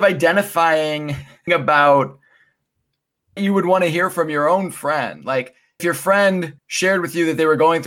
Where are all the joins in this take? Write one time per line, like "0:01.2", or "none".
0:01.5
0:03.4
0:05.8
0:06.6